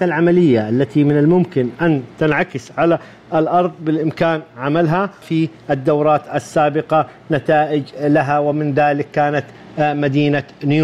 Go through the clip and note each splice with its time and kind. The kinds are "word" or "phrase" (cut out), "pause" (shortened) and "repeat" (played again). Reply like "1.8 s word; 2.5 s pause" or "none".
5.2 s word